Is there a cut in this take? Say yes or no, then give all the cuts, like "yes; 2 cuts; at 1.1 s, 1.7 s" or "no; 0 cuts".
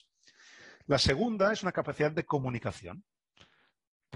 no; 0 cuts